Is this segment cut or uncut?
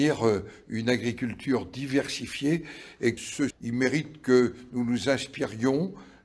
cut